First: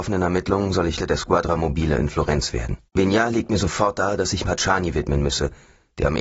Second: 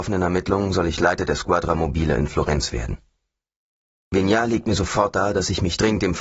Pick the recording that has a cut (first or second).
first